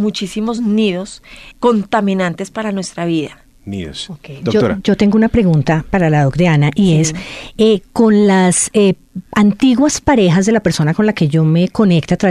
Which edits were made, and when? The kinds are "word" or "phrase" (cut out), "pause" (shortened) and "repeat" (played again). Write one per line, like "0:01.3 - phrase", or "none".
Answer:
0:01.5 - word